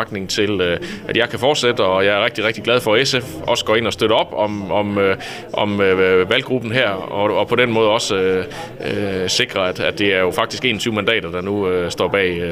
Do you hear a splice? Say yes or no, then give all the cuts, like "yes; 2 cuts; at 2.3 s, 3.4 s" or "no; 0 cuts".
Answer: no; 0 cuts